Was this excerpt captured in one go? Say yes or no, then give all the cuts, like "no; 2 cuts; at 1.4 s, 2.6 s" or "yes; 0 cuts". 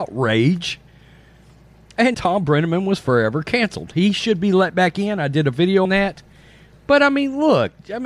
no; 2 cuts; at 2.1 s, 5.8 s